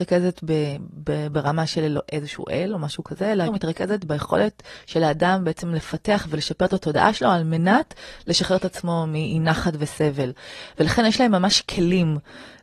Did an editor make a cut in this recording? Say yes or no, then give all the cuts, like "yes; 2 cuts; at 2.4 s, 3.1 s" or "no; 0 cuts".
yes; 2 cuts; at 2.1 s, 3.5 s